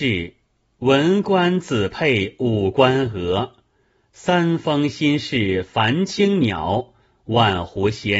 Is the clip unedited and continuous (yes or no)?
yes